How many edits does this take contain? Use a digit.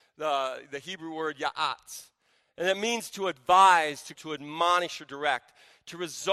1